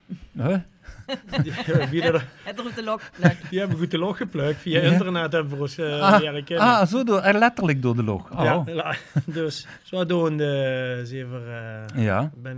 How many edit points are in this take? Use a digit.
1